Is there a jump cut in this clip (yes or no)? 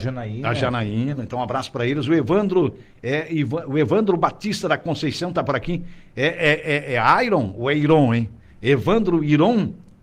no